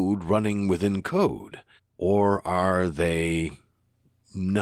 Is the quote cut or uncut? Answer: cut